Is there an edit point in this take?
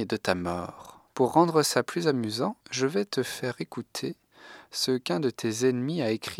yes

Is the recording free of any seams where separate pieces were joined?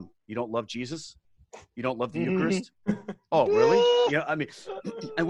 yes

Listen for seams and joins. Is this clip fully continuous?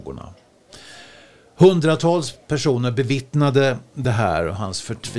yes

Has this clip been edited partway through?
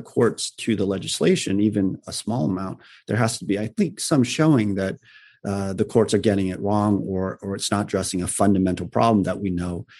no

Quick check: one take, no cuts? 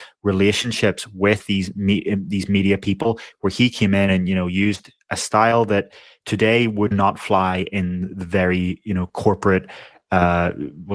yes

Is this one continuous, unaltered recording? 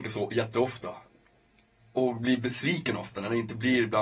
yes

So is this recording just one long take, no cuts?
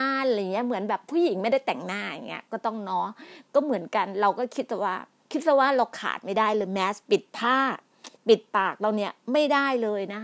no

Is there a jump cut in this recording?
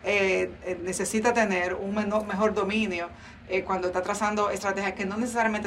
no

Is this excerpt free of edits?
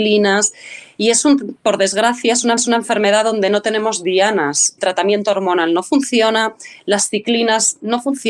no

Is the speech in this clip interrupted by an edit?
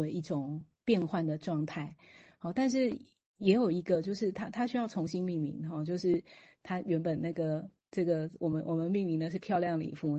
no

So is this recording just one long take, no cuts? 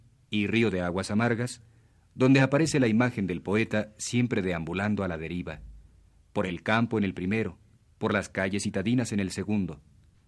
yes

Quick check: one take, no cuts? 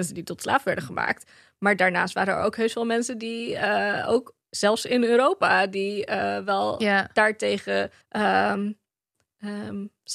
no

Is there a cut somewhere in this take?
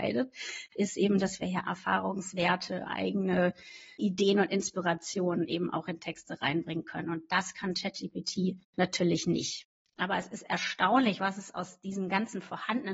yes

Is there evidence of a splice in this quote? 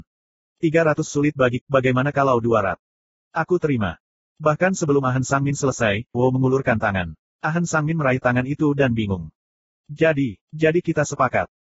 yes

